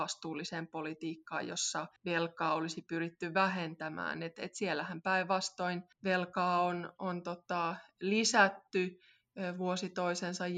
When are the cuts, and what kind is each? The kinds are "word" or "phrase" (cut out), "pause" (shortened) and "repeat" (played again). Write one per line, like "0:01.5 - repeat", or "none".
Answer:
0:02.0 - pause
0:05.9 - pause